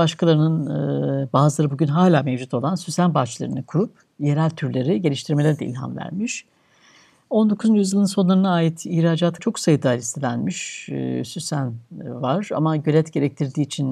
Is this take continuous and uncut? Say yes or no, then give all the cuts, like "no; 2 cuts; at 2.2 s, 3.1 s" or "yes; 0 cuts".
no; 1 cut; at 9.4 s